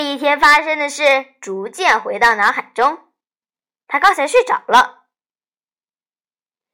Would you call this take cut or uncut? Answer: uncut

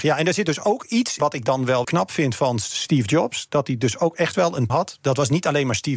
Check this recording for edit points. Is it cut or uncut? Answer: cut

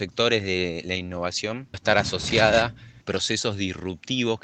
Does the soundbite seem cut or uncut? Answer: cut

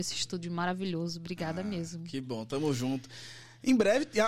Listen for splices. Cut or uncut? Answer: uncut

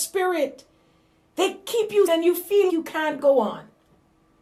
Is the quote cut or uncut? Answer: cut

